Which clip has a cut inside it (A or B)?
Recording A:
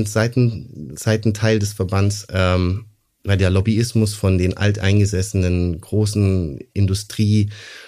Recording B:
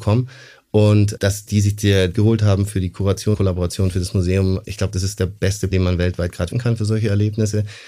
B